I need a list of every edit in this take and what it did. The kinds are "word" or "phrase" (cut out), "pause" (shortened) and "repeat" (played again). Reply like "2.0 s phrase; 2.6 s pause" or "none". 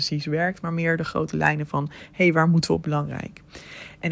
2.8 s phrase